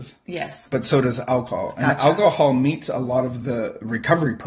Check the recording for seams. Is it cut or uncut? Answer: uncut